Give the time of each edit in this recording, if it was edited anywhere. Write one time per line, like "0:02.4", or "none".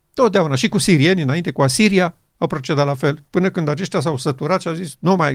0:03.3